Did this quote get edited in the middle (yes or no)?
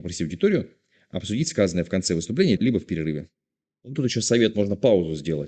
yes